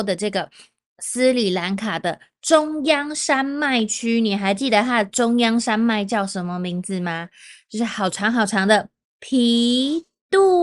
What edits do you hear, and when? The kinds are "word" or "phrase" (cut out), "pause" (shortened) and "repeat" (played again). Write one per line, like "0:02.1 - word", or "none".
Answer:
0:09.0 - pause